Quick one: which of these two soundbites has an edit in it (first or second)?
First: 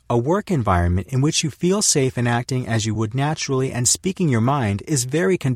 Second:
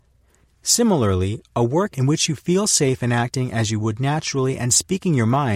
second